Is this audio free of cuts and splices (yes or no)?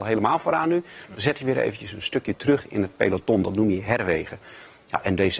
yes